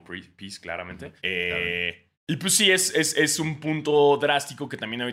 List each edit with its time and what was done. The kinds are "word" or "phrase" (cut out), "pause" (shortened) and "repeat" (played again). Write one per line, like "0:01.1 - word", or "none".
0:01.2 - pause
0:02.1 - pause